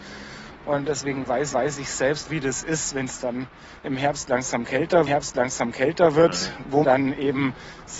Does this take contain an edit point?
yes; 4 cuts; at 1.5 s, 2.3 s, 5.1 s, 6.8 s

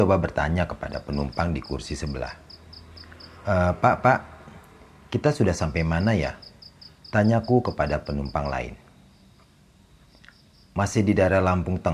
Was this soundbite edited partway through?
no; 0 cuts

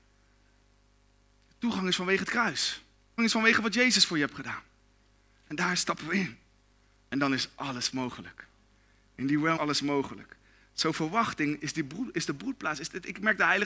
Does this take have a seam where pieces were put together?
yes; 2 cuts; at 3.2 s, 9.6 s

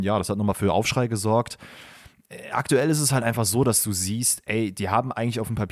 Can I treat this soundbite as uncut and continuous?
yes; 0 cuts

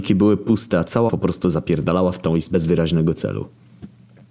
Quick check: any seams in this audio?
yes; 2 cuts; at 1.1 s, 2.5 s

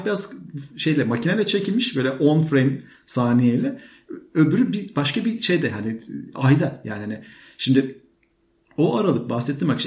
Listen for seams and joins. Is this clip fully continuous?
yes; 0 cuts

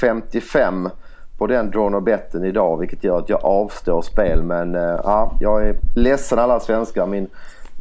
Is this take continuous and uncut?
yes; 0 cuts

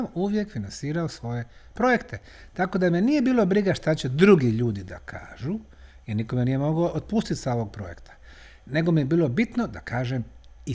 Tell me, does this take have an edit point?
no; 0 cuts

